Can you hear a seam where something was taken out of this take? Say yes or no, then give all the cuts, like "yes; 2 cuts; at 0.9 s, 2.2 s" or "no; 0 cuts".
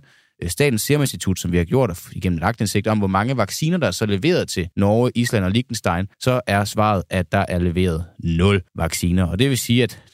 yes; 3 cuts; at 4.7 s, 6.1 s, 8.7 s